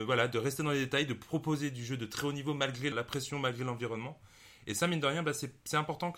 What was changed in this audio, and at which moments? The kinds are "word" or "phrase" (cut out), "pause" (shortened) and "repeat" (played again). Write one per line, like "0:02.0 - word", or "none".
0:02.9 - word